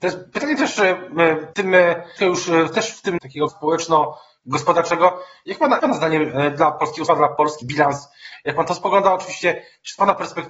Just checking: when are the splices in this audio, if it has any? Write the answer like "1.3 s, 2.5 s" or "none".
1.5 s, 2.2 s, 3.2 s, 3.5 s, 5.8 s, 7.1 s, 7.6 s